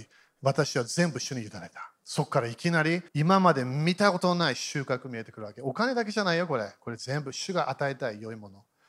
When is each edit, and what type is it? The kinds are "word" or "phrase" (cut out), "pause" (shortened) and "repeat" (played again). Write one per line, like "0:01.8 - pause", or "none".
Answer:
0:02.0 - pause
0:03.1 - pause